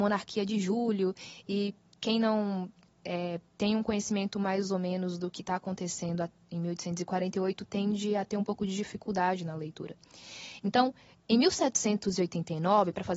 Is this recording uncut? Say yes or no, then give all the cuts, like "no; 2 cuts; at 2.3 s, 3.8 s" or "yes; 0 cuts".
yes; 0 cuts